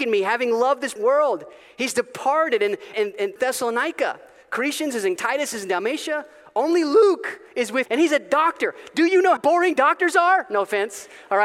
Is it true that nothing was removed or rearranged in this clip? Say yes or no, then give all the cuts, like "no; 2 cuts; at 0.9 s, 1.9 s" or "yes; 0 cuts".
no; 6 cuts; at 1.0 s, 2.9 s, 3.4 s, 5.2 s, 7.9 s, 9.4 s